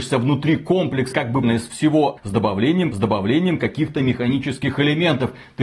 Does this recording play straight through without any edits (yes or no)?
no